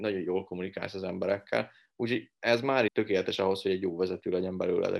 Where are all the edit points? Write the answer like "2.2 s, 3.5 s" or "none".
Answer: 2.9 s